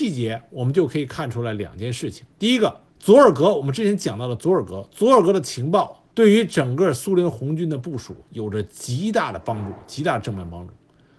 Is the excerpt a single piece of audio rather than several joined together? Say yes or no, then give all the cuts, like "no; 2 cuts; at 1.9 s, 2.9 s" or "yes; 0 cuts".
no; 3 cuts; at 2.3 s, 2.9 s, 6.1 s